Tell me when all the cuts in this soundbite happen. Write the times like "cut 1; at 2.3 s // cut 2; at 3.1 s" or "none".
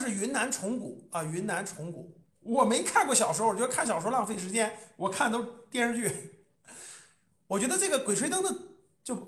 cut 1; at 2.2 s